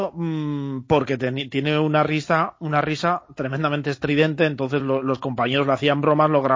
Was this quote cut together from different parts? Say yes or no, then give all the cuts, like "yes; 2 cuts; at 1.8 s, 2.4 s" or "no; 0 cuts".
no; 0 cuts